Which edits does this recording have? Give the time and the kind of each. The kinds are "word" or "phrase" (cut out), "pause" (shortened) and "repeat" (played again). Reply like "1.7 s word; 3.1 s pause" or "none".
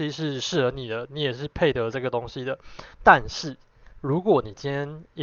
2.9 s pause; 3.9 s pause